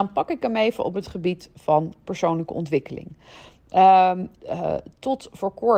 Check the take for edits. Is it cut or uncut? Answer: cut